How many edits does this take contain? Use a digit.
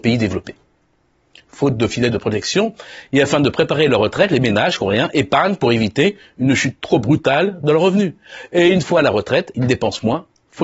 0